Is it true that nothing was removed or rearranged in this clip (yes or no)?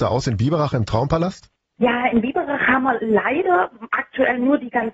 yes